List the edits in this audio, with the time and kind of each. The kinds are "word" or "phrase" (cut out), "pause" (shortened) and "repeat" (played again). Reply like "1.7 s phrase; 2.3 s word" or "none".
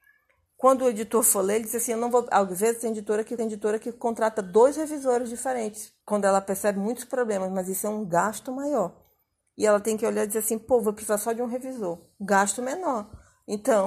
3.4 s repeat; 6.0 s pause